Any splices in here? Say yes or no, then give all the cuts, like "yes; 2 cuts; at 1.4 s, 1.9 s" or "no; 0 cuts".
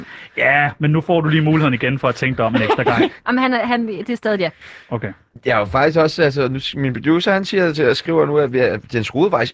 no; 0 cuts